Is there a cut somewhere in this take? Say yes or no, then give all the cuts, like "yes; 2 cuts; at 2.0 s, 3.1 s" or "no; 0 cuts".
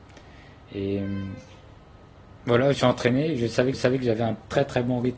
yes; 2 cuts; at 2.7 s, 3.7 s